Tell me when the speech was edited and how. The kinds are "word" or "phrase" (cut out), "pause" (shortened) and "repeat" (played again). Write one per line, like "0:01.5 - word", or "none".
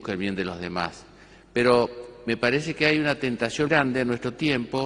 0:03.7 - word